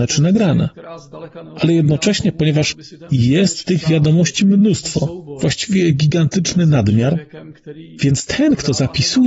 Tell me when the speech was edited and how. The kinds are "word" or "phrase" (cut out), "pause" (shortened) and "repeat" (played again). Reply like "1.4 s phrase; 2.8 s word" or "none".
none